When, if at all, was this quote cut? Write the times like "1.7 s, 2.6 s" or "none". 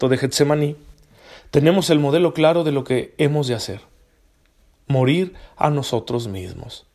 none